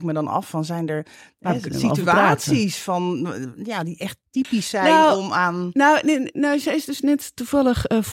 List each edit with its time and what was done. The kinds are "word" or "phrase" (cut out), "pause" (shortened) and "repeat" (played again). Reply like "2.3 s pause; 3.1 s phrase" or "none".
none